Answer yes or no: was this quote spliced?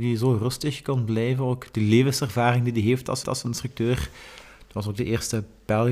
yes